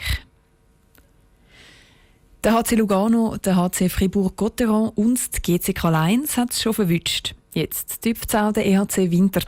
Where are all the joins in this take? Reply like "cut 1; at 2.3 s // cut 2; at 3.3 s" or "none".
none

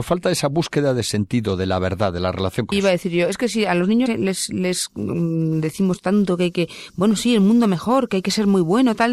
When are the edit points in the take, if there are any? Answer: cut 1; at 2.7 s // cut 2; at 4.1 s

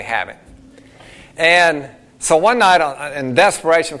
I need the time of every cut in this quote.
none

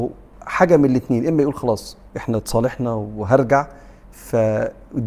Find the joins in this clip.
cut 1; at 2.1 s

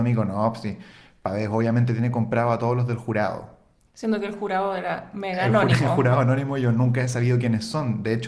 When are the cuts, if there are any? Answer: none

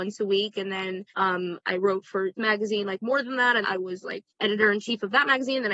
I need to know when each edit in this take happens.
cut 1; at 1.1 s // cut 2; at 2.4 s // cut 3; at 3.6 s // cut 4; at 4.3 s

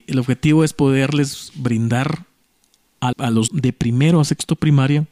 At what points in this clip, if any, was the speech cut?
cut 1; at 3.1 s // cut 2; at 3.5 s

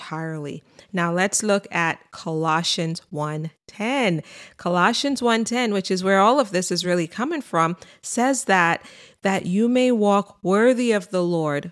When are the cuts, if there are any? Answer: none

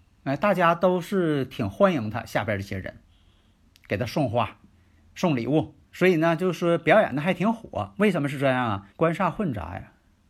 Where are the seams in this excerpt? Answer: cut 1; at 5.8 s // cut 2; at 8.9 s

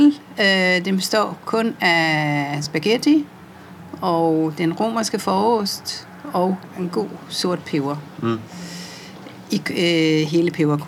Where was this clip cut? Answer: none

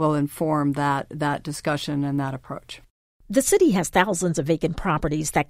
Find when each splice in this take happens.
none

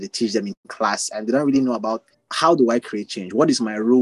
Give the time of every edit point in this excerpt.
cut 1; at 2.1 s

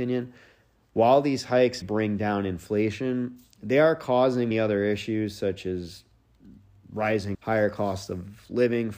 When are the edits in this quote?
cut 1; at 1.8 s // cut 2; at 4.5 s // cut 3; at 7.3 s

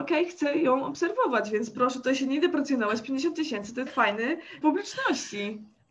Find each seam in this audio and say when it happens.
cut 1; at 3.9 s // cut 2; at 4.6 s

